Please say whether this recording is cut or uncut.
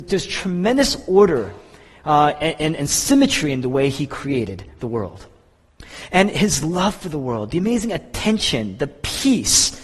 uncut